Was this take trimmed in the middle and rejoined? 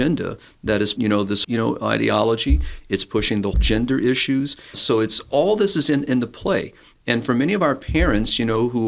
yes; 4 cuts; at 1.0 s, 1.4 s, 3.5 s, 4.7 s

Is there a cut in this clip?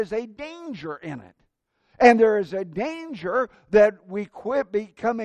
no; 0 cuts

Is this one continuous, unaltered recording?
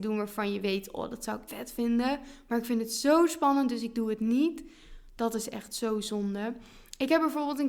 no; 1 cut; at 1.5 s

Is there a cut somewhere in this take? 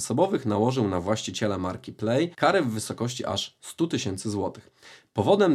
yes; 1 cut; at 2.3 s

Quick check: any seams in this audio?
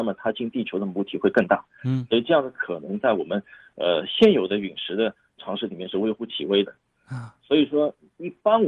no; 0 cuts

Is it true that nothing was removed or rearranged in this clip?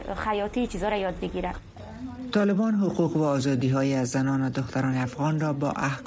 yes; 0 cuts

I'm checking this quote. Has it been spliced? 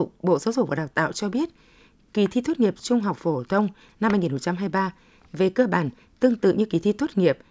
no; 0 cuts

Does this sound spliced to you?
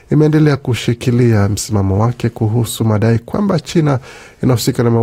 no; 0 cuts

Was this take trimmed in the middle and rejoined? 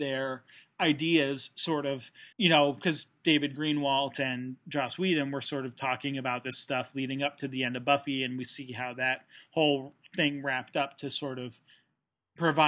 yes; 1 cut; at 2.3 s

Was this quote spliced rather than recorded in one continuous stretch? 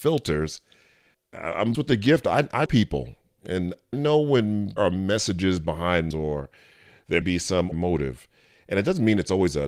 yes; 8 cuts; at 1.1 s, 1.7 s, 2.7 s, 3.9 s, 4.8 s, 6.1 s, 7.2 s, 7.7 s

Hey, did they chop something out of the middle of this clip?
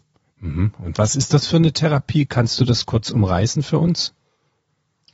no; 0 cuts

